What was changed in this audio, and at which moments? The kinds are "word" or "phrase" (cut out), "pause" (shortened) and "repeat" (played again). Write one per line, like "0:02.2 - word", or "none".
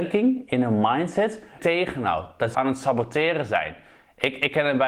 0:01.6 - phrase
0:02.5 - word